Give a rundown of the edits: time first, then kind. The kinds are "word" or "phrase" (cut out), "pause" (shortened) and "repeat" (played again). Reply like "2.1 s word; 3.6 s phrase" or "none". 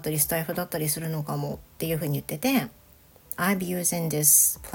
none